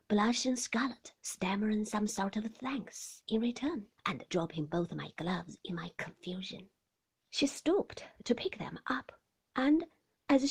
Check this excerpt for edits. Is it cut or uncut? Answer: cut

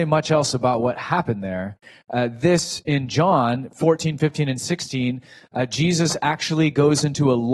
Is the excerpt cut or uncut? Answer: uncut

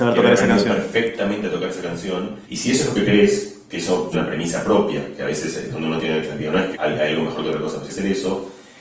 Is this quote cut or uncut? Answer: cut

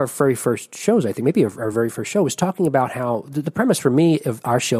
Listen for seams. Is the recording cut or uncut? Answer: uncut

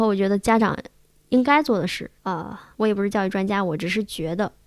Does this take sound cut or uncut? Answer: cut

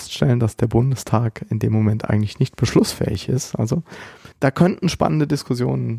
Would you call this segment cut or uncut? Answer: cut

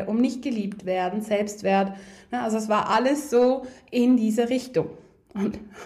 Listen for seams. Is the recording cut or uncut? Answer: uncut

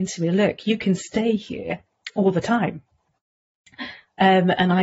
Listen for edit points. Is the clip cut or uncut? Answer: uncut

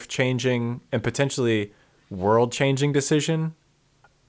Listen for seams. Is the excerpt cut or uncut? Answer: uncut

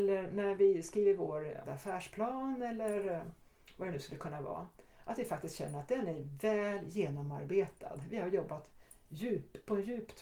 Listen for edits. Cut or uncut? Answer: cut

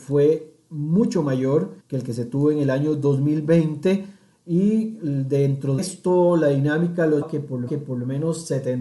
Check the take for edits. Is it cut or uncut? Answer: cut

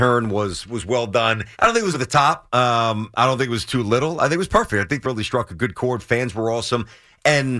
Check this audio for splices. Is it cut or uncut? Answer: cut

